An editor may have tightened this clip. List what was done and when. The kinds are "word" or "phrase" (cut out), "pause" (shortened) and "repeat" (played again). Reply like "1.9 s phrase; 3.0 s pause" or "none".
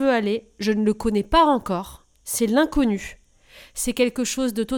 2.1 s pause